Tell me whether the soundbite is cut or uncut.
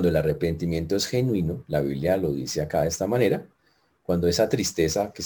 uncut